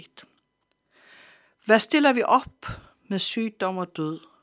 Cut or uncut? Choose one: uncut